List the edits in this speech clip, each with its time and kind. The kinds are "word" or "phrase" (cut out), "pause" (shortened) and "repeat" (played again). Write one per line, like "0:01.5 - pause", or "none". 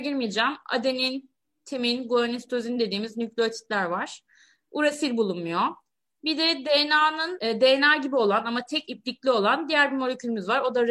none

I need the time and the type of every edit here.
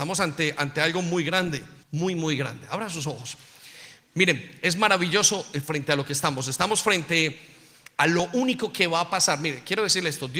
0:01.8 - pause

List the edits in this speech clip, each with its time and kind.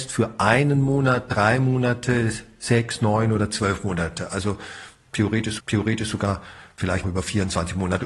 0:05.6 - repeat
0:07.0 - word

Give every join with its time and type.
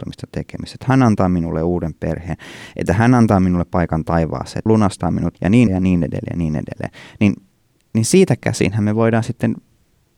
0:04.7 - word
0:05.3 - word
0:05.7 - word
0:07.5 - pause

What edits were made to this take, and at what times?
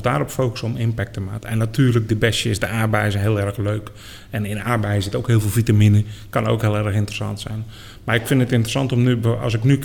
none

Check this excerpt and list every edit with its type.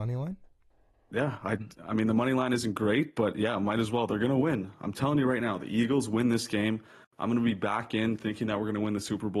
none

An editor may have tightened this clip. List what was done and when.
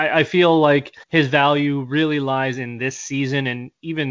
0:01.0 - pause

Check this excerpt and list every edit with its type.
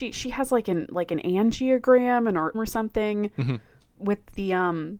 0:02.5 - word

